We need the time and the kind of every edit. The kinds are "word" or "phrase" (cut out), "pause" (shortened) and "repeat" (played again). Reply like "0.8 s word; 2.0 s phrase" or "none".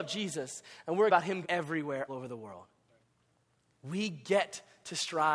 1.1 s word; 1.4 s word; 2.1 s word; 3.0 s pause